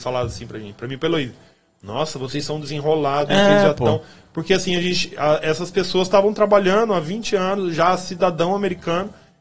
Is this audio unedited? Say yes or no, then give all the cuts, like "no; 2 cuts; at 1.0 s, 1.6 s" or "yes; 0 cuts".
yes; 0 cuts